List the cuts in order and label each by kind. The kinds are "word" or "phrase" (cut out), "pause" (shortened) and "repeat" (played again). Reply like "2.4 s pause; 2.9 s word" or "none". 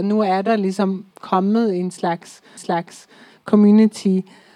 1.1 s pause; 2.6 s repeat